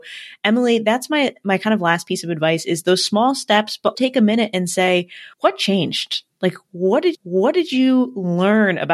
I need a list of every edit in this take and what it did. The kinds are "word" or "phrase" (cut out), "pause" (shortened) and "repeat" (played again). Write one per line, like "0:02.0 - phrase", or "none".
0:03.9 - word
0:05.3 - pause
0:07.1 - repeat